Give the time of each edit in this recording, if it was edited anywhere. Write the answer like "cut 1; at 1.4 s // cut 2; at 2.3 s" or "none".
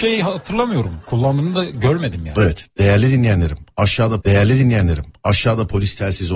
cut 1; at 4.2 s